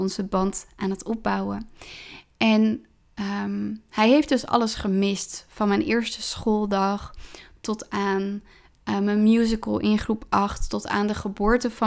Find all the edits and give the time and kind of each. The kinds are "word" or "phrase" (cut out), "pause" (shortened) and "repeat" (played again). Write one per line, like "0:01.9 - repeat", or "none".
none